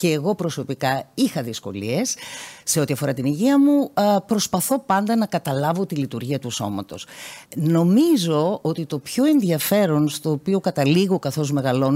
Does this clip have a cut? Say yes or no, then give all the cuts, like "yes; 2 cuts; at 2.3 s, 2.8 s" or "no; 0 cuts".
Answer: yes; 1 cut; at 7.5 s